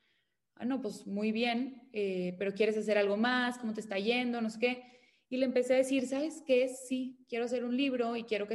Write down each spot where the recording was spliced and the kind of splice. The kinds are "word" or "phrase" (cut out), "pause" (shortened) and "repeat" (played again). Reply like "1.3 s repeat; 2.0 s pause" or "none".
none